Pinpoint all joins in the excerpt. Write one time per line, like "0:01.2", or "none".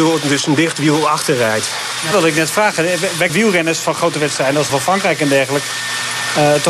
0:02.1
0:03.3
0:04.7